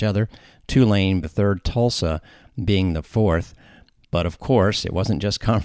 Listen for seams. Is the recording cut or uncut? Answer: cut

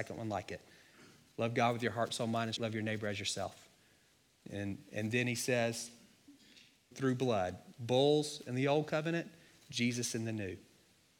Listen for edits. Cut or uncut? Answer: cut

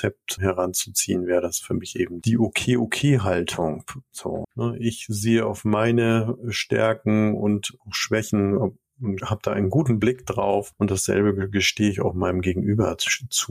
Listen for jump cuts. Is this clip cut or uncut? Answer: cut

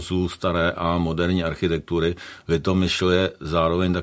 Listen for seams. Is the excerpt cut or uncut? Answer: uncut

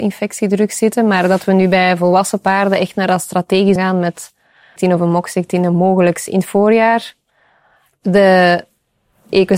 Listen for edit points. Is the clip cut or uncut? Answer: cut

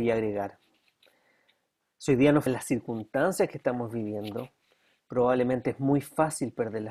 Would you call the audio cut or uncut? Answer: cut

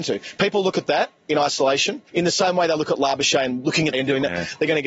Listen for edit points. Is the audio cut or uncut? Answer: cut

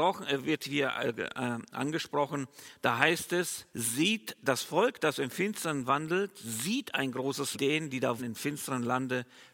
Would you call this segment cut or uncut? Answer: cut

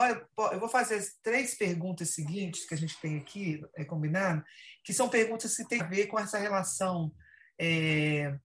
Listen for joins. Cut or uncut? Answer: cut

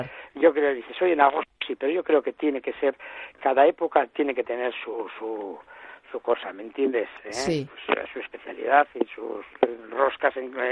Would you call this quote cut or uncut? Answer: uncut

